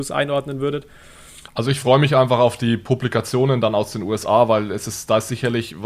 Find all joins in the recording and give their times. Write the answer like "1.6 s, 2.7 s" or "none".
1.5 s